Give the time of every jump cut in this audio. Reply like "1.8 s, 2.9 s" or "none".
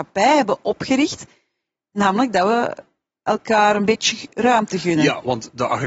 none